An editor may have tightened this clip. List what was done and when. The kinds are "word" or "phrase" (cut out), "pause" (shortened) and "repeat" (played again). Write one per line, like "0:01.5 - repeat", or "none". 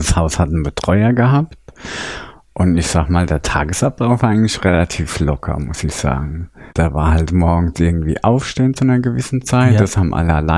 0:06.7 - pause